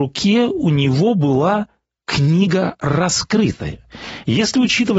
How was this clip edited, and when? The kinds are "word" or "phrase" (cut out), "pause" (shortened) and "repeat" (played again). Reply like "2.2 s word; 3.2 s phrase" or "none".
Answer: none